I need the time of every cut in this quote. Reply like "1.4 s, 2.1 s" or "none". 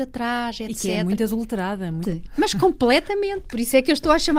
2.0 s